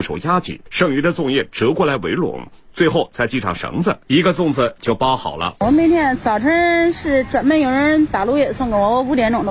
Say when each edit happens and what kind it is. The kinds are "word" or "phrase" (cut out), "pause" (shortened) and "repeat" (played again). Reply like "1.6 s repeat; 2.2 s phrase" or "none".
none